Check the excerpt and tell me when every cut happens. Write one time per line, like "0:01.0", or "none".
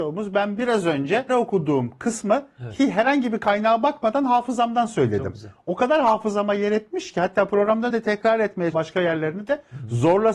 0:01.3
0:07.9
0:08.7